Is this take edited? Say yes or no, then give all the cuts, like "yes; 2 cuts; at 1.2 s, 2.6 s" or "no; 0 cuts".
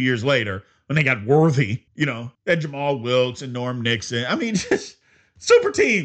yes; 2 cuts; at 1.9 s, 2.3 s